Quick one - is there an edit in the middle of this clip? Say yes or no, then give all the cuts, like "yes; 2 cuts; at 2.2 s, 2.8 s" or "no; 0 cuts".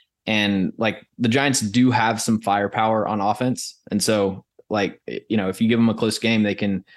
no; 0 cuts